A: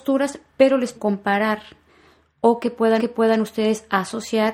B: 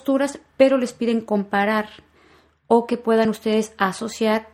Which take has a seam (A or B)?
A